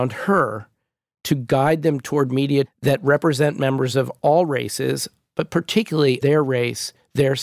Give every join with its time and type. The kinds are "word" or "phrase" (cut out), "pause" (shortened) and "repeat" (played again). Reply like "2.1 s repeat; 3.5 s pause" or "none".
2.7 s word; 6.2 s word